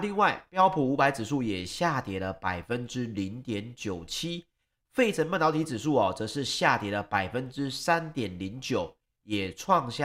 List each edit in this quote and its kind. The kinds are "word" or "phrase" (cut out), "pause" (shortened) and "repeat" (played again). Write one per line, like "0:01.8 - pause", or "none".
none

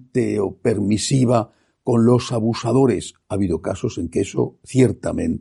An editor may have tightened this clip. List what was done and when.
none

